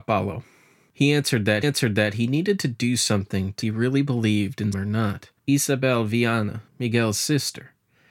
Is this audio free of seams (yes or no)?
no